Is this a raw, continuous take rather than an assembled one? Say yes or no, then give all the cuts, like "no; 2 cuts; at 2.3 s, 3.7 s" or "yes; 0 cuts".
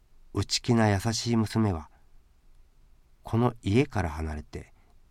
yes; 0 cuts